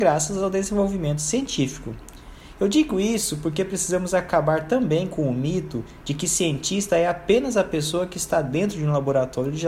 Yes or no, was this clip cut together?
no